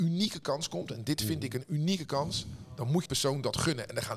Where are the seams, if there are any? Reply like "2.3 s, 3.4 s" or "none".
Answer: 3.1 s